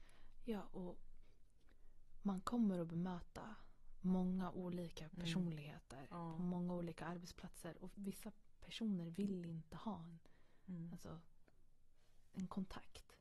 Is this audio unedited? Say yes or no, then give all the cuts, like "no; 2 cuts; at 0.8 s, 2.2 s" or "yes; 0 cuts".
no; 1 cut; at 7.9 s